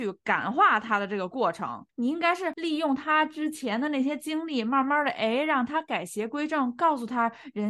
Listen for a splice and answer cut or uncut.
uncut